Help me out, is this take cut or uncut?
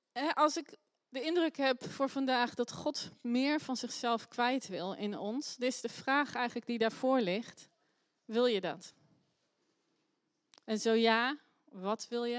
uncut